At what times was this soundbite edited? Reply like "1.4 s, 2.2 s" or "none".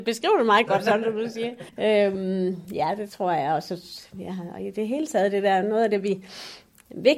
1.7 s